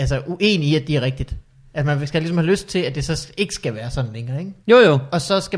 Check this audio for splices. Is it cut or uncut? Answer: cut